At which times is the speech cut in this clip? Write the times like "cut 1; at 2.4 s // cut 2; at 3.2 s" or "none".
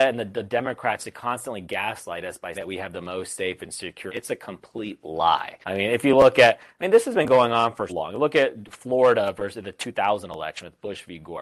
cut 1; at 2.5 s // cut 2; at 4.1 s // cut 3; at 5.6 s // cut 4; at 7.9 s